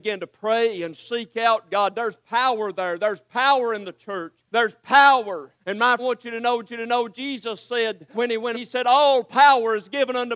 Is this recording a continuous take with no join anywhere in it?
no; 6 cuts; at 4.5 s, 5.6 s, 6.0 s, 6.6 s, 8.1 s, 8.5 s

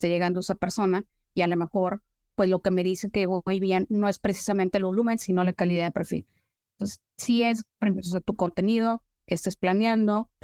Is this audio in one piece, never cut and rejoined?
yes; 0 cuts

